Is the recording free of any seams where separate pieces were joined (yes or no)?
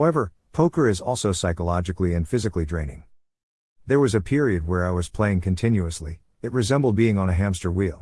yes